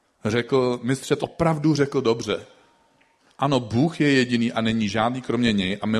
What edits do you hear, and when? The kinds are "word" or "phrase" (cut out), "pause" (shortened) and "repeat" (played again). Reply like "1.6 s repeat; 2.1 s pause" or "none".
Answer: 1.2 s word; 3.2 s pause